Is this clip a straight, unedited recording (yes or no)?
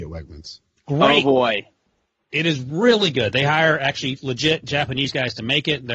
yes